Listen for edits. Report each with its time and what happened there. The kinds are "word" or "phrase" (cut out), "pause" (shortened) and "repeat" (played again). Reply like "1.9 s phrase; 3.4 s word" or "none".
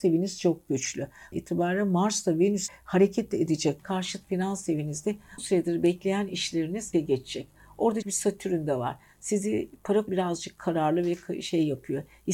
1.3 s word; 2.7 s word; 3.8 s word; 5.4 s word; 6.9 s word; 8.0 s word; 10.1 s word